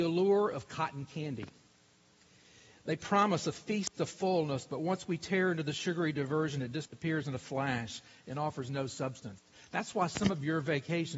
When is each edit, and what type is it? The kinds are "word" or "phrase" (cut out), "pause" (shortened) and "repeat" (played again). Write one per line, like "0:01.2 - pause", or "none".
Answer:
none